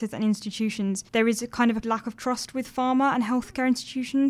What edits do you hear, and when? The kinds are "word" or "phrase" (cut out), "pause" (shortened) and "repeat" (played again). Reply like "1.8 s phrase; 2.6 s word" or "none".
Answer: 1.1 s pause; 1.8 s word